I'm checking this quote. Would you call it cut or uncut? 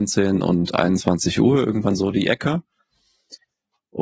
uncut